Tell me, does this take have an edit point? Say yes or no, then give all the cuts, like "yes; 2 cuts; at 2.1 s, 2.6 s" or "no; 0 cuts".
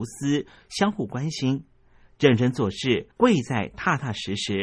yes; 1 cut; at 3.1 s